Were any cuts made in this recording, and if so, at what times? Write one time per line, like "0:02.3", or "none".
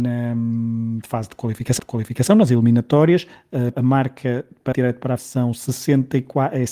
0:01.8
0:03.7
0:04.7
0:05.2